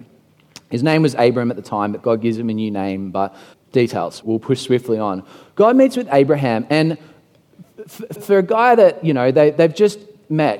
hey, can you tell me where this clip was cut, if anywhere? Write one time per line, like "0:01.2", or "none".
0:03.5
0:04.2
0:08.2